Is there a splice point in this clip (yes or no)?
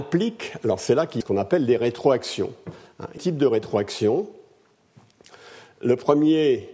yes